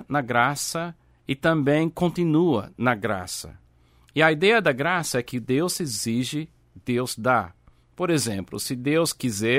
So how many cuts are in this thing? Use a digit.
1